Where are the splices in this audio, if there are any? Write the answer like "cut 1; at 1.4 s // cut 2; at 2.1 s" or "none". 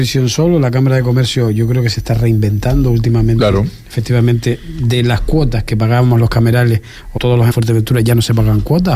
cut 1; at 7.2 s // cut 2; at 7.5 s